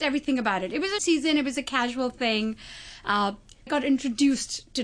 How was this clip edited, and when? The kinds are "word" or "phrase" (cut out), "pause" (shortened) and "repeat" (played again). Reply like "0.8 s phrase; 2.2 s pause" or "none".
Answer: 1.0 s word; 3.7 s phrase